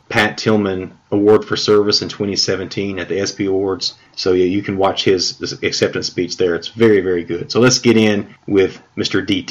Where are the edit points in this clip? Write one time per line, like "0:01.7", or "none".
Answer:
none